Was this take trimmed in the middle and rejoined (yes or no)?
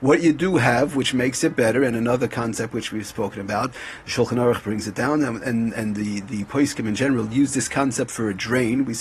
no